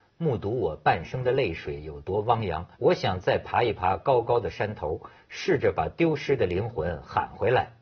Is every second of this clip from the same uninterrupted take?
no; 1 cut; at 2.8 s

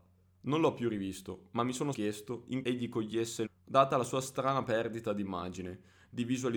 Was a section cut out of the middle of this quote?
yes; 3 cuts; at 1.9 s, 2.6 s, 3.5 s

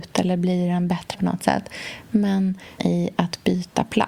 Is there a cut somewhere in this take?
yes; 2 cuts; at 1.1 s, 2.8 s

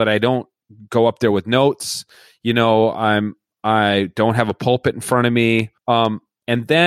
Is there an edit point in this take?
no; 0 cuts

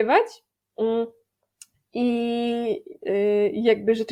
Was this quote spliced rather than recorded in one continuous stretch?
no; 0 cuts

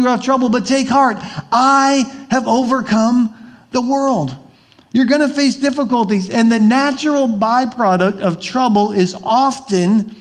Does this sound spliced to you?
no; 0 cuts

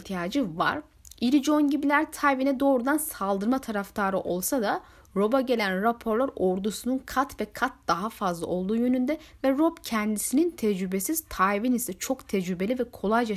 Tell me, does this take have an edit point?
no; 0 cuts

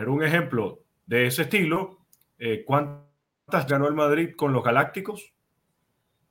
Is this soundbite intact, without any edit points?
no; 2 cuts; at 1.1 s, 3.7 s

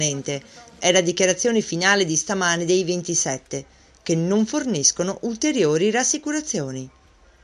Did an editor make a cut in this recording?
no; 0 cuts

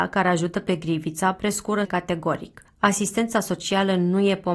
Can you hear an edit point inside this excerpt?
yes; 1 cut; at 1.8 s

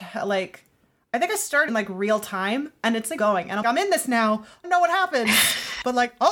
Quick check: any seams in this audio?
yes; 4 cuts; at 1.7 s, 3.2 s, 3.6 s, 4.6 s

